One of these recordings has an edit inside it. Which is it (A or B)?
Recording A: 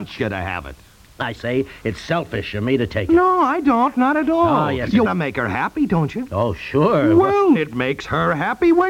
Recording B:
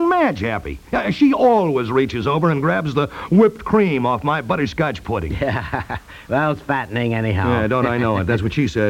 A